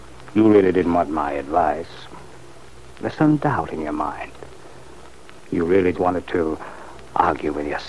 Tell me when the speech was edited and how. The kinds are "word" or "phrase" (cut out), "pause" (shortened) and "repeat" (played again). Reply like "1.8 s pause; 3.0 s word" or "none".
5.9 s word